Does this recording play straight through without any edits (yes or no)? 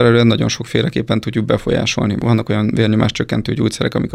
yes